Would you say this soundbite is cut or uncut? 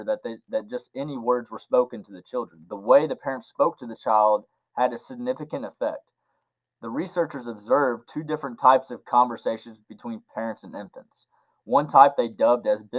uncut